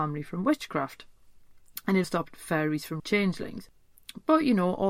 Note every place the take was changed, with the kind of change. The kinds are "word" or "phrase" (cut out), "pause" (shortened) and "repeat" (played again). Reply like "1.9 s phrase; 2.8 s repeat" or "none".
2.0 s word; 3.0 s phrase